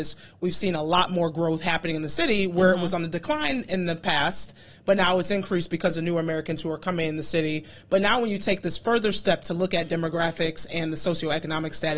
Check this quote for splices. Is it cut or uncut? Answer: uncut